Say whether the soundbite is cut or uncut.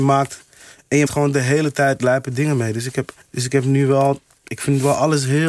cut